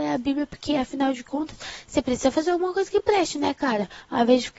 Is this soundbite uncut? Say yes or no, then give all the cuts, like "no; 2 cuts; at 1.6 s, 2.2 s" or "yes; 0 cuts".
yes; 0 cuts